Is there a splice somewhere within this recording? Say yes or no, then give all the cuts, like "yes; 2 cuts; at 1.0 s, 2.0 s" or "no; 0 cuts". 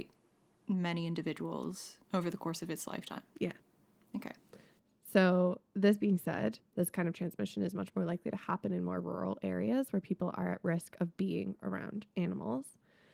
yes; 2 cuts; at 2.0 s, 3.3 s